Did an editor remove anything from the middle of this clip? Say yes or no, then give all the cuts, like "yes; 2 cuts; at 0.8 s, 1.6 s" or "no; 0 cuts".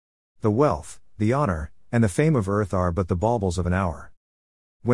no; 0 cuts